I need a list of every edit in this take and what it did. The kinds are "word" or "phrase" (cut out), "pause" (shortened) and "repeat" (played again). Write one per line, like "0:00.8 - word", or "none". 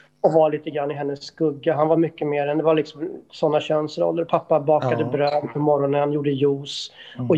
none